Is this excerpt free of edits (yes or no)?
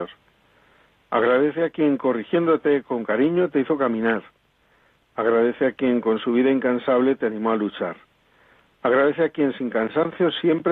yes